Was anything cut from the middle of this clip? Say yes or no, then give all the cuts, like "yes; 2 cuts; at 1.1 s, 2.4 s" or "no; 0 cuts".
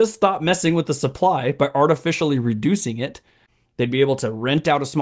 no; 0 cuts